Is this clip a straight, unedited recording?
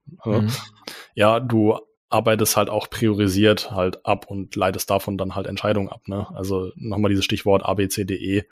yes; 0 cuts

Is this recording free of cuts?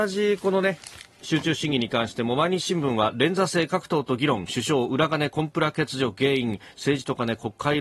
no; 1 cut; at 1.1 s

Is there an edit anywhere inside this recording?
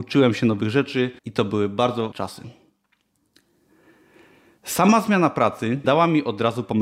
yes; 3 cuts; at 1.2 s, 2.1 s, 5.8 s

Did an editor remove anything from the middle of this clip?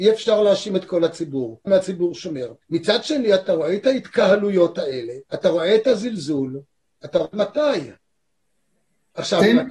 yes; 4 cuts; at 1.7 s, 2.6 s, 5.3 s, 7.3 s

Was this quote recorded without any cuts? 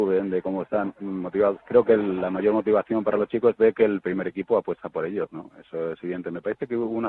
yes; 0 cuts

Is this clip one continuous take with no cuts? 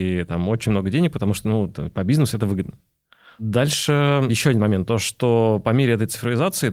yes; 0 cuts

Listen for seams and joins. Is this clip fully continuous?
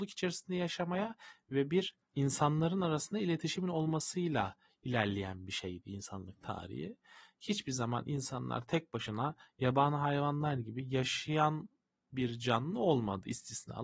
yes; 0 cuts

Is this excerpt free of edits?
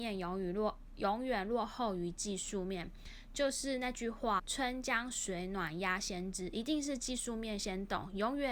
no; 1 cut; at 4.4 s

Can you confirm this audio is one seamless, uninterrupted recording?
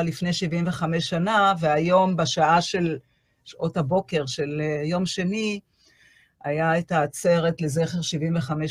yes; 0 cuts

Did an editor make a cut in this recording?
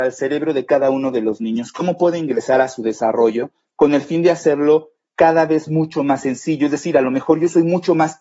no; 0 cuts

